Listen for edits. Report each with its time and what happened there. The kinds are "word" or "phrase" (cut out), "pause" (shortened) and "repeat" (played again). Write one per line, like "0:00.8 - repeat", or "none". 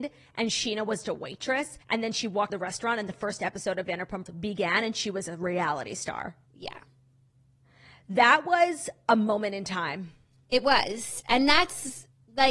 0:01.0 - word
0:01.8 - pause
0:02.5 - word
0:04.3 - word
0:06.5 - pause